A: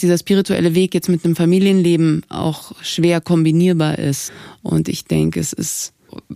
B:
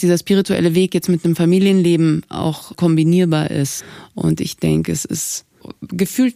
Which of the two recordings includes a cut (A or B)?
B